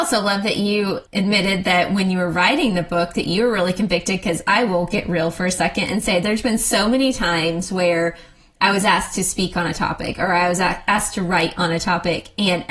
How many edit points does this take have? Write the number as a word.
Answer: zero